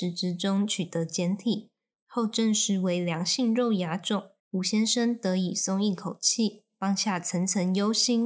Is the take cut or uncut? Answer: cut